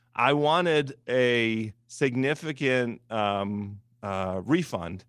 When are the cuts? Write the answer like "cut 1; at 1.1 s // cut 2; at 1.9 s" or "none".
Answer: none